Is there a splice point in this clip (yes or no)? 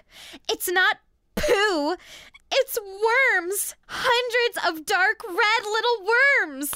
yes